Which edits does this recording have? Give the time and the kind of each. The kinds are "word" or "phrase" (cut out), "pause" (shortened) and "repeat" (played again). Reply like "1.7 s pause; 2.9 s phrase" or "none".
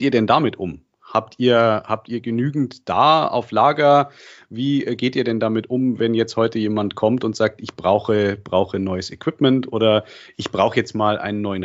none

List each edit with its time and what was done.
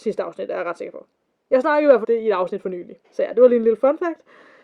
1.3 s pause; 2.0 s word; 3.0 s pause

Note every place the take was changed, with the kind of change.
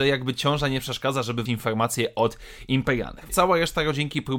1.5 s word; 3.3 s word

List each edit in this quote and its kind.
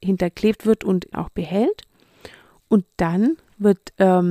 1.1 s phrase

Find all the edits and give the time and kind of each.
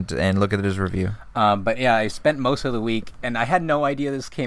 none

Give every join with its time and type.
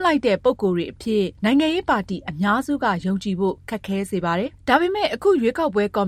1.3 s pause

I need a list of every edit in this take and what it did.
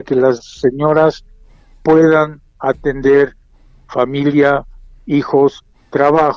none

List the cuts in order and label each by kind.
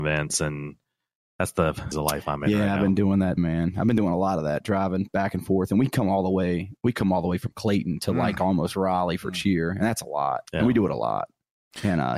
1.9 s phrase; 3.4 s word; 6.8 s pause; 10.5 s pause

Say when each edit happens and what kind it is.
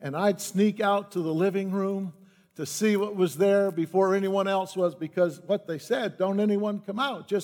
none

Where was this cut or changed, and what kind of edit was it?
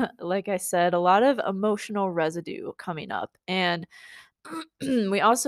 none

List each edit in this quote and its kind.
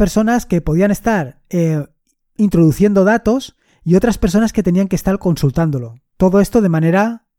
none

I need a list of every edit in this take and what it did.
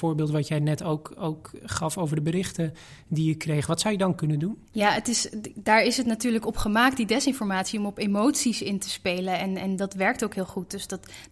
4.6 s pause

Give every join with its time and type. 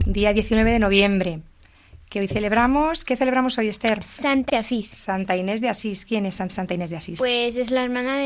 4.5 s word; 6.5 s repeat

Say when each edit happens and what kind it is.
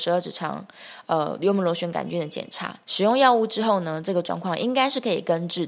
2.8 s pause

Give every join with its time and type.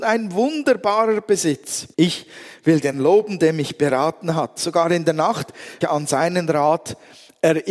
1.9 s pause; 2.9 s word; 5.8 s phrase

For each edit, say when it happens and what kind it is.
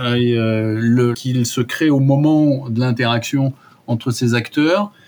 1.1 s phrase

